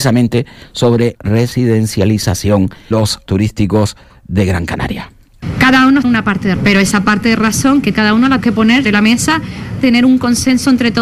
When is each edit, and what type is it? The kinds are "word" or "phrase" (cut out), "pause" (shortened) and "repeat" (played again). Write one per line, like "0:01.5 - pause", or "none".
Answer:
0:01.1 - word
0:02.9 - word
0:03.3 - word
0:06.0 - word
0:06.6 - word
0:07.9 - word
0:08.4 - word
0:08.8 - word
0:09.8 - word